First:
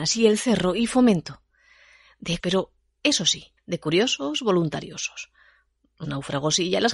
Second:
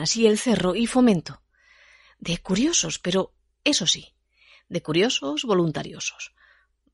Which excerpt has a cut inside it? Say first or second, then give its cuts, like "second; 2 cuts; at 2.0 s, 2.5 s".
first; 3 cuts; at 2.4 s, 3.6 s, 6.0 s